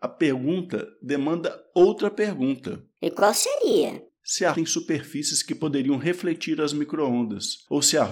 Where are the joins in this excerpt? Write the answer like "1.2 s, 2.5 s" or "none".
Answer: 4.5 s